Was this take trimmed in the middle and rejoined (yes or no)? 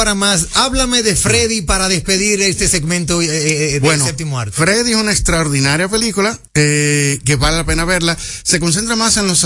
yes